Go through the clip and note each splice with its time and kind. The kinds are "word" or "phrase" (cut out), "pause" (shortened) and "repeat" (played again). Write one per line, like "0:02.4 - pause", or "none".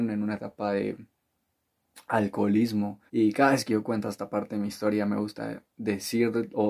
0:03.1 - pause